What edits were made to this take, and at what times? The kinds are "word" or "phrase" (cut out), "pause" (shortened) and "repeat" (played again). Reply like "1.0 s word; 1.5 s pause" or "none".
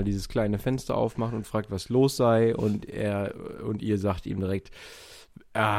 none

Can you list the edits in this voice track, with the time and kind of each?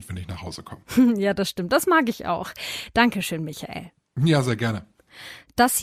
none

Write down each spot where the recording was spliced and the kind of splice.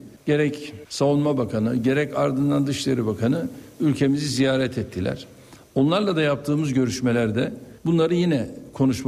7.8 s pause

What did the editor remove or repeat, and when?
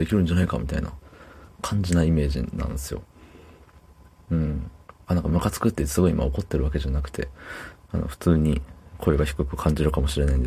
1.5 s pause; 5.0 s pause

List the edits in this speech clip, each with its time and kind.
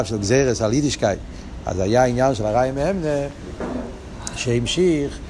none

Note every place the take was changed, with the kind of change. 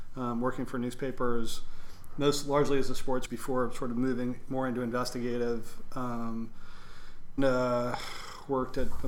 3.2 s phrase; 7.4 s word

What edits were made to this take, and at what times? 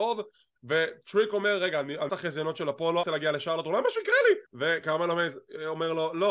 2.1 s phrase; 3.0 s phrase; 4.5 s pause

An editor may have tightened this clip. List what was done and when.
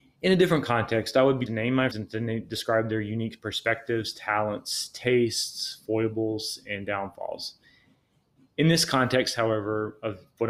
1.5 s phrase; 1.9 s word

